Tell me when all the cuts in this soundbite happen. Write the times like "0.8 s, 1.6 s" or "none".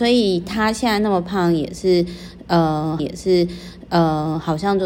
3.0 s